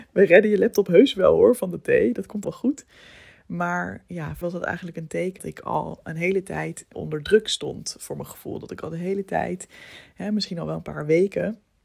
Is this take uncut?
no; 4 cuts; at 2.4 s, 4.4 s, 5.4 s, 6.9 s

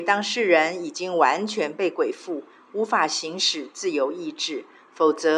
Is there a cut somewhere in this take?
no; 0 cuts

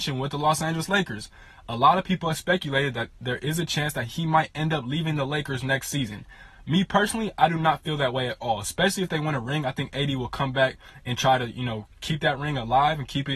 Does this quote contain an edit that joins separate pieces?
no; 0 cuts

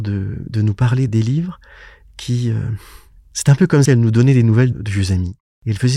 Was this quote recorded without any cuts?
no; 4 cuts; at 1.1 s, 3.2 s, 3.9 s, 4.7 s

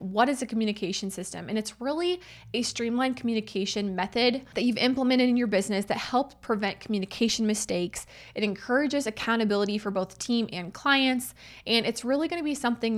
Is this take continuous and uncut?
yes; 0 cuts

